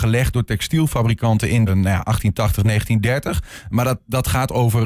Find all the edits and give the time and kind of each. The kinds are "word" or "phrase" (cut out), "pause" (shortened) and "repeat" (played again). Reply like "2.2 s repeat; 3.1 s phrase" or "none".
1.7 s phrase